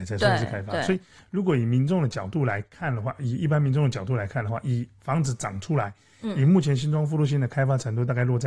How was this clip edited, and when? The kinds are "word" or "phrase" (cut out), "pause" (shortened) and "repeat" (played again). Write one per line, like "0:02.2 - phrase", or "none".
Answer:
none